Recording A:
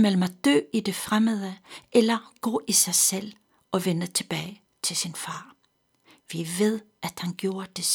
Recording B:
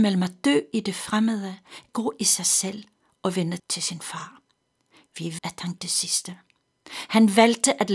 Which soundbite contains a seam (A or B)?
B